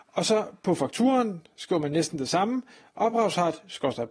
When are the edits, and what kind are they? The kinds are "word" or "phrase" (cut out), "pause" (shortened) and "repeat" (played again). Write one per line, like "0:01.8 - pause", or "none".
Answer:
none